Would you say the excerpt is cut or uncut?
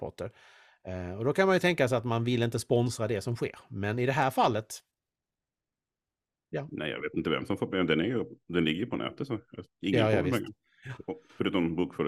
uncut